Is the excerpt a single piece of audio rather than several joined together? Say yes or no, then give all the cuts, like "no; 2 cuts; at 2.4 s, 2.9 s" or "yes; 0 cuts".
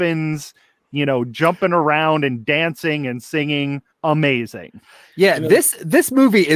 no; 1 cut; at 3.9 s